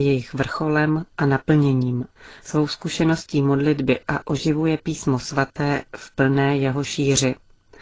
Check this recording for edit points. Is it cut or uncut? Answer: cut